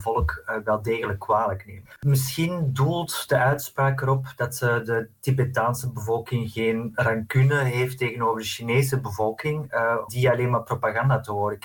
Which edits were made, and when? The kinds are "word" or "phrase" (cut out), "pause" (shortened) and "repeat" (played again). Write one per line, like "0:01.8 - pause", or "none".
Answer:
0:10.1 - word